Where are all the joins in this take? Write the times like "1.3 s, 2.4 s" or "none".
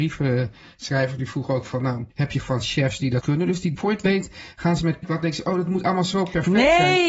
2.1 s, 2.4 s, 3.2 s, 3.7 s, 5.0 s